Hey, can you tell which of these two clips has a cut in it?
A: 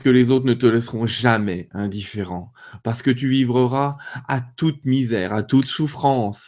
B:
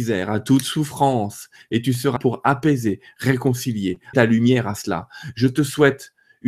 B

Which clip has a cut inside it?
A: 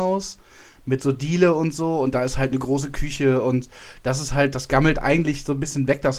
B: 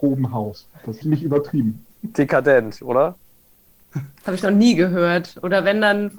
B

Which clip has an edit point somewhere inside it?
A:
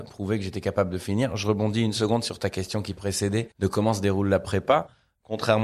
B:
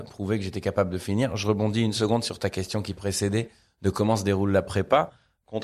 A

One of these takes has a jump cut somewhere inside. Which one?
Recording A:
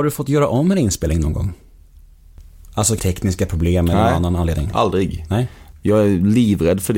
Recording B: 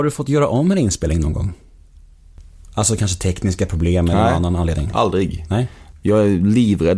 A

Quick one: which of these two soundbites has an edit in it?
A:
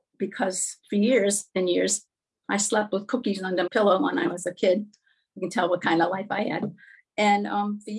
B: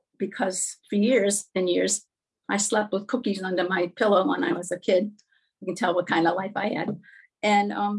A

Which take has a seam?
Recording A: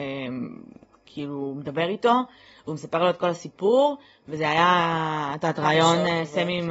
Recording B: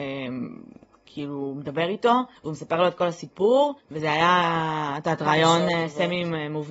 B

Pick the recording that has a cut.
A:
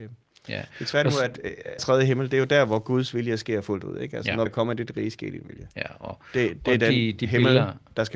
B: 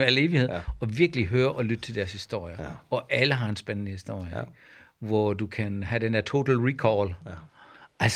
A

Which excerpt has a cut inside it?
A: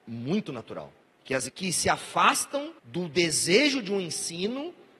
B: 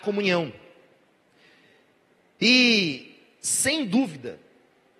A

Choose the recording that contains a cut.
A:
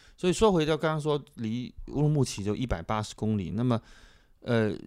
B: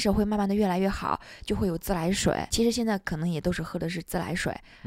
B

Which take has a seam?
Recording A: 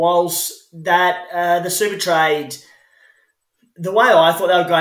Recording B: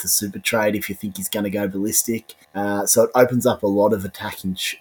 B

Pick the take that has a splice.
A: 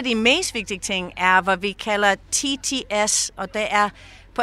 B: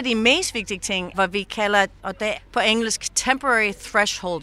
B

